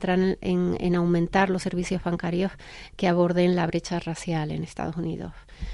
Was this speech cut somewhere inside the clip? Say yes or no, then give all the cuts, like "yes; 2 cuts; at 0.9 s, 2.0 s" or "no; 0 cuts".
no; 0 cuts